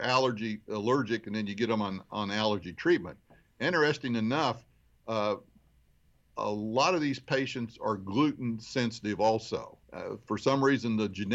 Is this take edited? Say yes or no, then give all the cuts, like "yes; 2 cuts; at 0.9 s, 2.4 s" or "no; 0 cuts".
yes; 1 cut; at 9.8 s